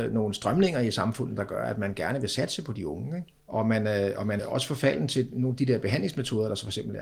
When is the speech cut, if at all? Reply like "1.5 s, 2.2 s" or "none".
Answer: 3.4 s, 4.4 s